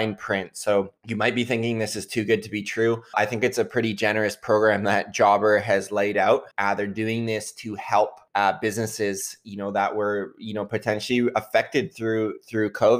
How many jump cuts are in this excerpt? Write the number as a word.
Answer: four